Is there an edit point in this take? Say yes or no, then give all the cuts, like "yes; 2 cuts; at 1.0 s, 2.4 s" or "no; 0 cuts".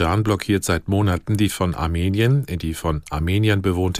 yes; 1 cut; at 1.5 s